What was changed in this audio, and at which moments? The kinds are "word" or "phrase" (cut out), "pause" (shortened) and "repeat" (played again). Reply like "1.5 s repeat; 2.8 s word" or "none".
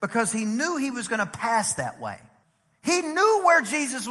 2.4 s pause